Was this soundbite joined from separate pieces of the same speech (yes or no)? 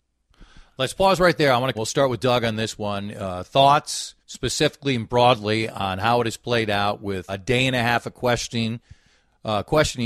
yes